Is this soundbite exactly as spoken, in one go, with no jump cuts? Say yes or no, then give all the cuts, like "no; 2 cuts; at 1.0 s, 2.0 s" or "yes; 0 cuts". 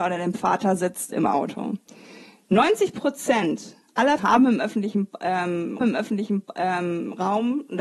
no; 2 cuts; at 4.2 s, 5.8 s